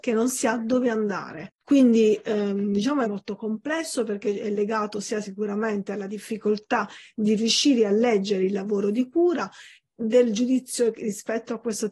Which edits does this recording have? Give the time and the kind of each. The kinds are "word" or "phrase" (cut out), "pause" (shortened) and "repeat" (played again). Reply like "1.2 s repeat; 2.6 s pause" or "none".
3.0 s phrase